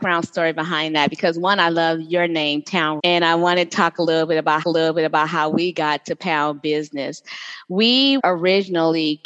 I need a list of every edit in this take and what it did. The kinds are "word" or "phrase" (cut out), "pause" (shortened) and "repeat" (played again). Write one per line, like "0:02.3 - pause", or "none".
0:03.0 - word
0:04.6 - repeat
0:08.2 - word